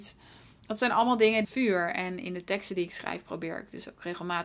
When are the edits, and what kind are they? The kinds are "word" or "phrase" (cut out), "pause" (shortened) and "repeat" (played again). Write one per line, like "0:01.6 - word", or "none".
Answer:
0:01.4 - phrase